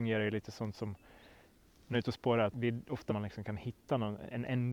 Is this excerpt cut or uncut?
cut